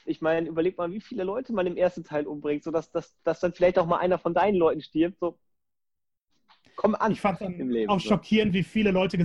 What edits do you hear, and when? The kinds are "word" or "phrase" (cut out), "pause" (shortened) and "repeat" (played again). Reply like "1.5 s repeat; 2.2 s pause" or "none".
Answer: none